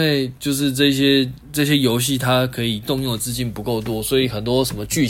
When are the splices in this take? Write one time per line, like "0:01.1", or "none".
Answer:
0:01.4